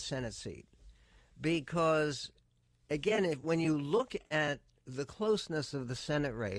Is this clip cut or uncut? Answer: uncut